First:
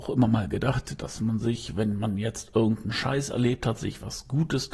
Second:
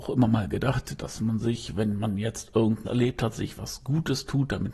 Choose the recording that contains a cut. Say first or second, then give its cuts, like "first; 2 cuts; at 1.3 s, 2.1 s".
second; 1 cut; at 2.8 s